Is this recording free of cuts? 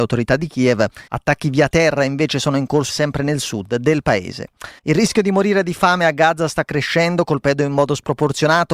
no; 3 cuts; at 1.1 s, 2.9 s, 4.8 s

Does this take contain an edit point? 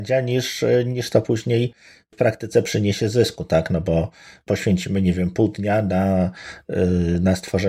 no; 0 cuts

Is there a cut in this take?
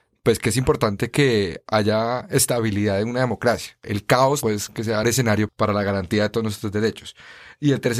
yes; 2 cuts; at 4.4 s, 5.0 s

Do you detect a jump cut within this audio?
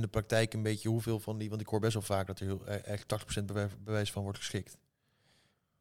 no; 0 cuts

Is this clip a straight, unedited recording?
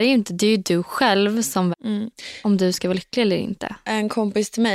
no; 1 cut; at 1.7 s

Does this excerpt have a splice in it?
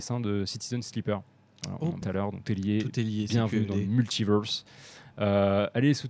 yes; 2 cuts; at 2.0 s, 2.4 s

